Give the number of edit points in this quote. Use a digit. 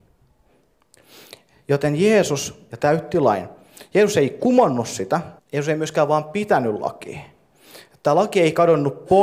2